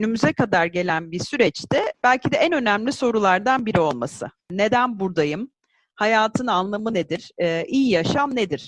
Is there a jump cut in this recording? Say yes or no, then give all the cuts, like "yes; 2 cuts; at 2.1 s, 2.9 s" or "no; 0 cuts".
no; 0 cuts